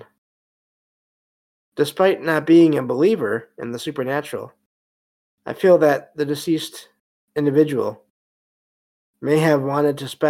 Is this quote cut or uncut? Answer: uncut